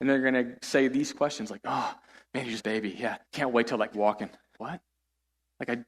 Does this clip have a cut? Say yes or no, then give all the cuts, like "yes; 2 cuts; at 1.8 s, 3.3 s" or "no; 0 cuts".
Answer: yes; 4 cuts; at 2.6 s, 3.2 s, 3.9 s, 4.5 s